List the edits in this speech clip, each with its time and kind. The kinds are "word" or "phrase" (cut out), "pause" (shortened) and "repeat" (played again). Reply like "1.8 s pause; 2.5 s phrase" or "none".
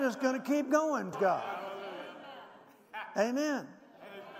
1.1 s word